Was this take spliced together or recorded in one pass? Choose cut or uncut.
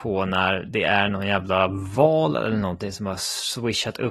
uncut